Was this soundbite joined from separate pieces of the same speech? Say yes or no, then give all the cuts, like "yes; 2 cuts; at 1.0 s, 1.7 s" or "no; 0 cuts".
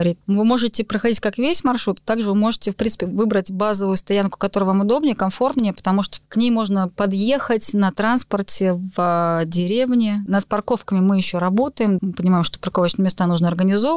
no; 0 cuts